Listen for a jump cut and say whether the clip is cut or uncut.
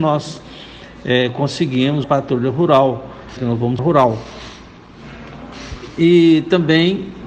cut